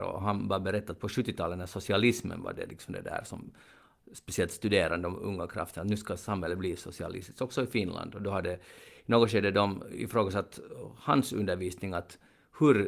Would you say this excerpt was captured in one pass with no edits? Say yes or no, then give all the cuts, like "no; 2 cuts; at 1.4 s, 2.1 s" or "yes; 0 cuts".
yes; 0 cuts